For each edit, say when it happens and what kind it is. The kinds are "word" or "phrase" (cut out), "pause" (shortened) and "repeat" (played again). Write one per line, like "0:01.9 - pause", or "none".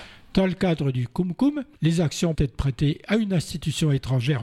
0:02.3 - word